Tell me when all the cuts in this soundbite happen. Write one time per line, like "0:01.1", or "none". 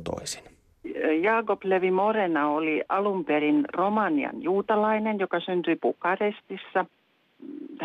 none